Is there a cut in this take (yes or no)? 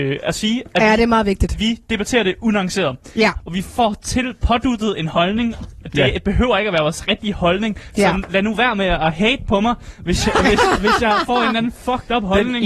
no